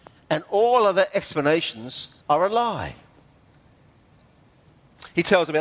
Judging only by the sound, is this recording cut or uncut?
cut